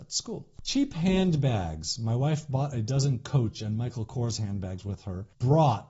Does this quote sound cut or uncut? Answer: uncut